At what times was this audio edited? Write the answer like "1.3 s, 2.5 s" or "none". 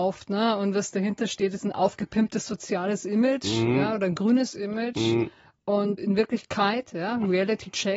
6.0 s